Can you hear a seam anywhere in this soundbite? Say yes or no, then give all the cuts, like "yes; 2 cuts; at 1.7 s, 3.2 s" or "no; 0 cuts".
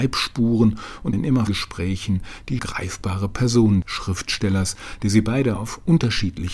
yes; 4 cuts; at 1.1 s, 1.5 s, 2.6 s, 3.8 s